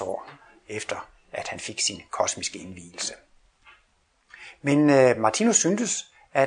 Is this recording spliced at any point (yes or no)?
no